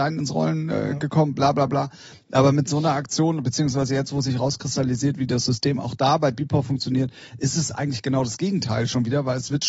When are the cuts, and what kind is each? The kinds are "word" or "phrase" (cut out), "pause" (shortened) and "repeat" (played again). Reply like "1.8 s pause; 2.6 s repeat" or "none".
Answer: none